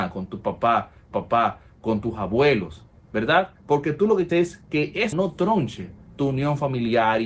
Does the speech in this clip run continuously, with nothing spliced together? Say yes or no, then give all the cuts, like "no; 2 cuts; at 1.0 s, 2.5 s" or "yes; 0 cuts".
no; 4 cuts; at 1.1 s, 3.6 s, 4.3 s, 5.1 s